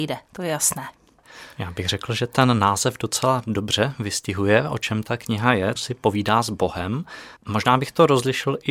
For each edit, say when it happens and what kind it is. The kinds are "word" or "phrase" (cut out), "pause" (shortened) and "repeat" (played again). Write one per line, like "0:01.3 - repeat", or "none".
0:01.5 - pause
0:05.8 - phrase
0:07.4 - pause